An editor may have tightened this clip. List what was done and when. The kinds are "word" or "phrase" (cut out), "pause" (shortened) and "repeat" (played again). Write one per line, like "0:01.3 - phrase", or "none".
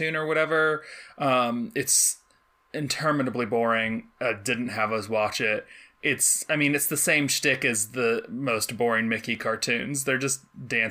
none

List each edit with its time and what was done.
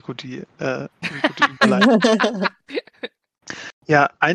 none

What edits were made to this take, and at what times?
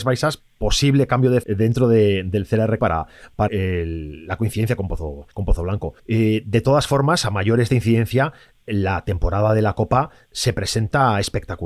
0:01.4 - word
0:02.8 - word
0:03.5 - word
0:05.3 - pause
0:06.0 - pause
0:07.7 - phrase

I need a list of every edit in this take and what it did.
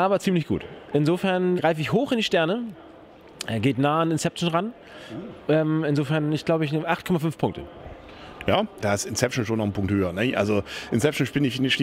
0:01.6 - word
0:08.8 - word

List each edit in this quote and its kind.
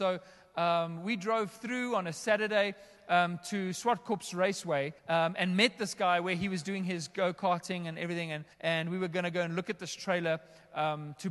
0:05.0 - pause
0:08.5 - pause

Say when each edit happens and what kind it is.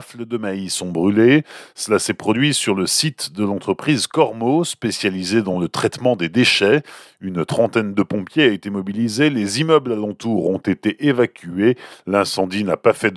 none

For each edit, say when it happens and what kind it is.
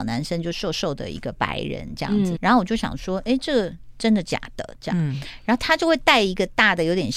0:02.4 - word

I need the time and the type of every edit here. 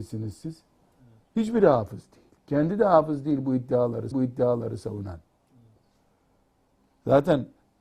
0:02.4 - pause
0:04.1 - repeat

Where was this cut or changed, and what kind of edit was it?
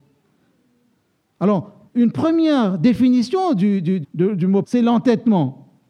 0:01.9 - pause
0:04.0 - word
0:04.6 - word

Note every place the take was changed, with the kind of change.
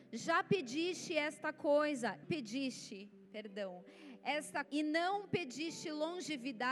0:02.2 - phrase
0:03.2 - pause
0:04.6 - word

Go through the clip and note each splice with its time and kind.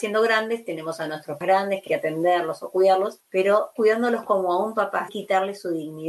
0:01.4 - word
0:01.9 - phrase
0:03.8 - word
0:05.1 - word

